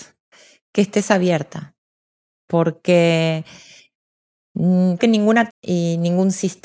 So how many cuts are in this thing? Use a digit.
2